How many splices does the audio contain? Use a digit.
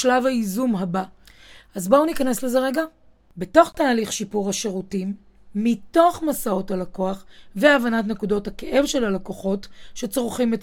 0